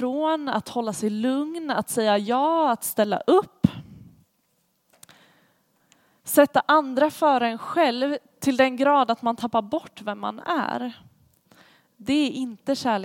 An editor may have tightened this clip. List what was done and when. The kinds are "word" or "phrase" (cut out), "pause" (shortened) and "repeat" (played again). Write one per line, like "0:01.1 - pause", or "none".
none